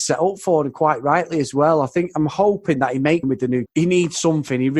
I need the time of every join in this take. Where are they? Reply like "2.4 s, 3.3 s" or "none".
3.2 s, 3.7 s